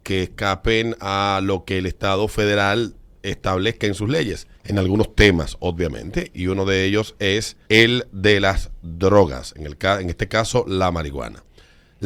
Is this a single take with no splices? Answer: no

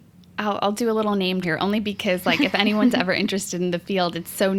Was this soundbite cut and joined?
yes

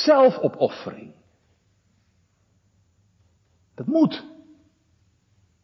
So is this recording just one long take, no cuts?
yes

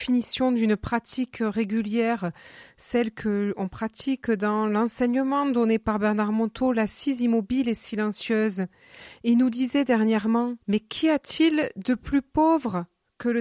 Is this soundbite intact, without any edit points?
no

